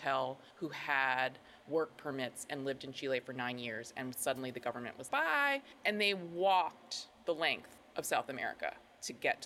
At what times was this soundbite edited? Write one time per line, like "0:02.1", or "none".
0:05.1